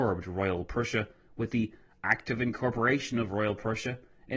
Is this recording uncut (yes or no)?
yes